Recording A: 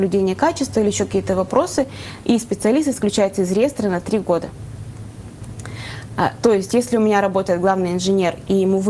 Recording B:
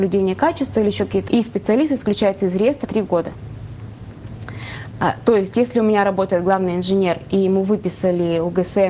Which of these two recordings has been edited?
B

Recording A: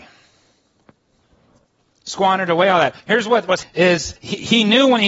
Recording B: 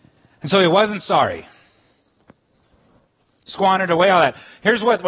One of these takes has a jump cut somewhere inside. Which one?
A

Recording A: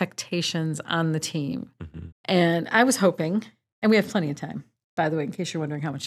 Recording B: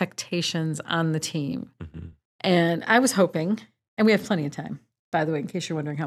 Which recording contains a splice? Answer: A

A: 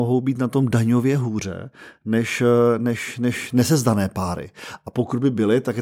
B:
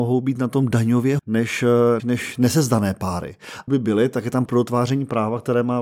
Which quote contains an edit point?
B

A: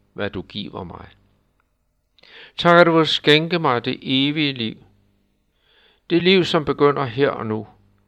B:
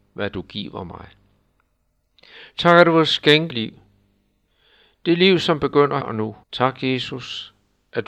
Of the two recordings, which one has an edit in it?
B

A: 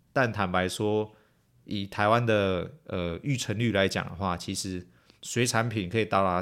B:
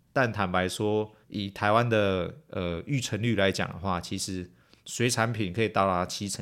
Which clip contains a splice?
B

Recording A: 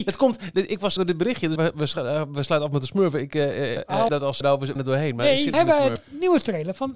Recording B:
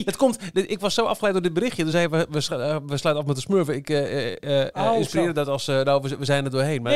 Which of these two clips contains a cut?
A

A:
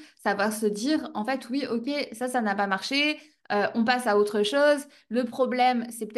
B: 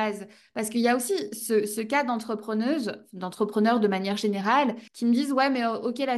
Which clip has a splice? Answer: B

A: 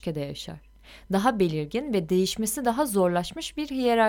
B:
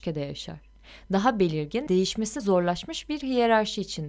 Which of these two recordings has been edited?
B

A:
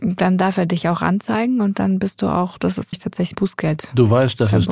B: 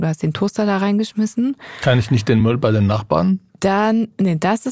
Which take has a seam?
A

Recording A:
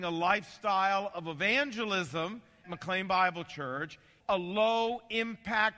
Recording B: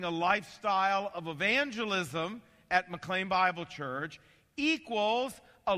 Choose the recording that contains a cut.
A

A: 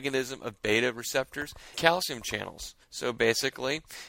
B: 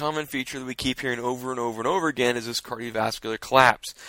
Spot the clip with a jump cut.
A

